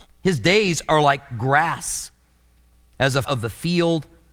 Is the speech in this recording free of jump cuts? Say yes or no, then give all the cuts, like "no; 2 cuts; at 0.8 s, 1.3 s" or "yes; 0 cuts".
no; 1 cut; at 3.2 s